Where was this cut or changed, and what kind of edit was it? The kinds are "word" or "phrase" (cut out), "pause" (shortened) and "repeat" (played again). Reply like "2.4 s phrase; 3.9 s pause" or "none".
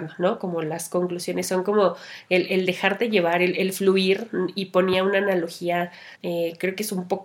6.1 s pause